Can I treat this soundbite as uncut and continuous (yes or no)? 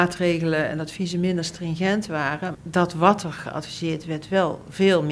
no